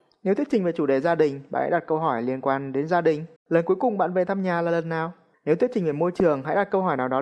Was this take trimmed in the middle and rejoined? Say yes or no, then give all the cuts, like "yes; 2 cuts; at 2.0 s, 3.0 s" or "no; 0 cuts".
yes; 2 cuts; at 3.4 s, 5.3 s